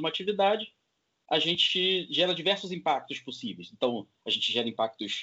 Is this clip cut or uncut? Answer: uncut